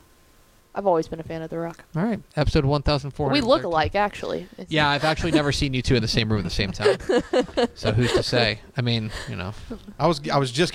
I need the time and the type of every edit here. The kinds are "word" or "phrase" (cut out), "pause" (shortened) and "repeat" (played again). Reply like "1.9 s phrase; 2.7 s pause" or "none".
none